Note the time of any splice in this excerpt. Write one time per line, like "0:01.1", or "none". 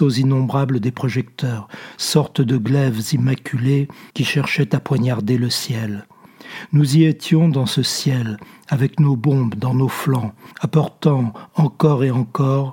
0:04.1
0:10.5